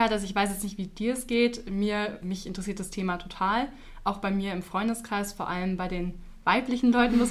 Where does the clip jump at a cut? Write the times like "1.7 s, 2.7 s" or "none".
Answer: 2.2 s